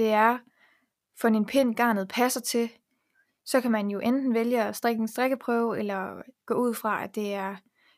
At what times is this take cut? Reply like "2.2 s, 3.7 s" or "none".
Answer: none